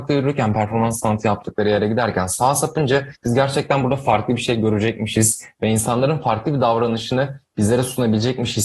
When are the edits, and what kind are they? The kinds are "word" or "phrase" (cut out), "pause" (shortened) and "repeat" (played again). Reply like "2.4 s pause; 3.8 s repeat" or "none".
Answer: 3.2 s pause